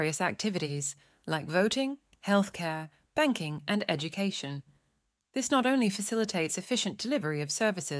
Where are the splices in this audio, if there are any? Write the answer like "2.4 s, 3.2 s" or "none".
none